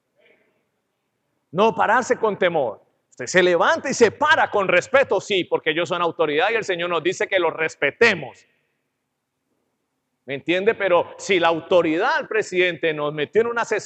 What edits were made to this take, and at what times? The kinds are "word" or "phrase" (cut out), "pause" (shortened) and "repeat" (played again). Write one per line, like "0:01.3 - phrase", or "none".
none